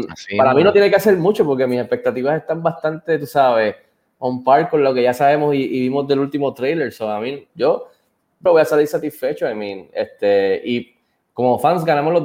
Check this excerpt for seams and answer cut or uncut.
cut